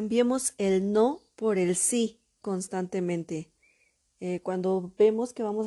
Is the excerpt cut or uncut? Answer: uncut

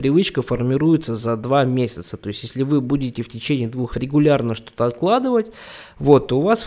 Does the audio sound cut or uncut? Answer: cut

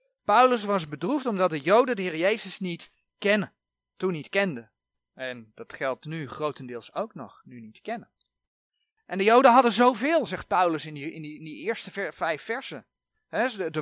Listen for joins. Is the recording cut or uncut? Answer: uncut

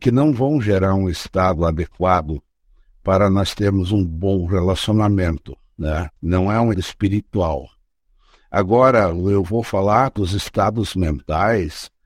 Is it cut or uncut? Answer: cut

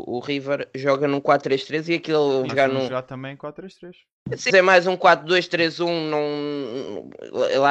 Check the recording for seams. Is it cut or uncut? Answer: cut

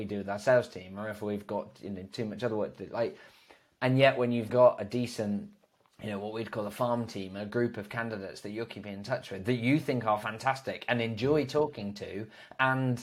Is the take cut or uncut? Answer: cut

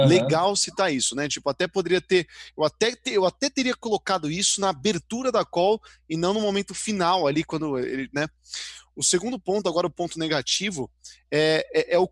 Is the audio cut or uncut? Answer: uncut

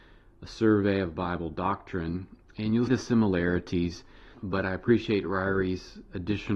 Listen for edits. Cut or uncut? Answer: cut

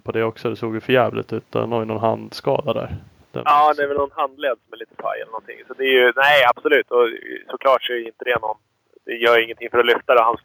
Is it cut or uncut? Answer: uncut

